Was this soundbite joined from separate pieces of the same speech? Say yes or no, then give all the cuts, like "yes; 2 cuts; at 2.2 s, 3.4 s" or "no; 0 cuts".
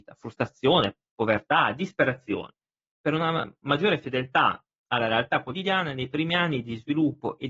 no; 0 cuts